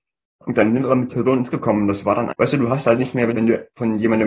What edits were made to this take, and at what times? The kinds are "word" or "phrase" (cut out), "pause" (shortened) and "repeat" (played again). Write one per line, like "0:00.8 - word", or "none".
0:01.1 - word
0:01.5 - word
0:02.3 - word
0:03.3 - word